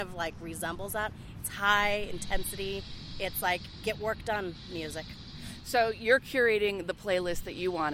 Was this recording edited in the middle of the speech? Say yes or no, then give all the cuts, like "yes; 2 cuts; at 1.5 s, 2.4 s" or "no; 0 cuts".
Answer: no; 0 cuts